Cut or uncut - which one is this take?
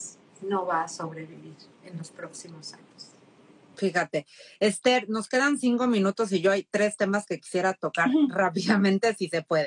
uncut